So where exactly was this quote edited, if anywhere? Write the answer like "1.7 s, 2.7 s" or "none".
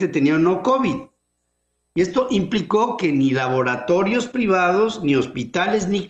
none